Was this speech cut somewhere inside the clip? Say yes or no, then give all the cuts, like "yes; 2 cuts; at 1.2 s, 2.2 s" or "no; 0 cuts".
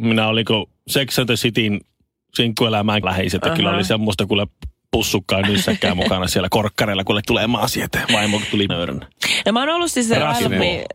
yes; 3 cuts; at 3.0 s, 7.3 s, 8.7 s